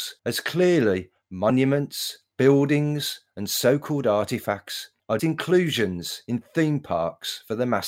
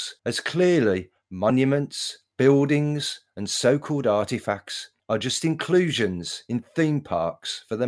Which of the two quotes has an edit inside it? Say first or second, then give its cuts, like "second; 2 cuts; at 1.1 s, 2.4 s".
first; 1 cut; at 5.2 s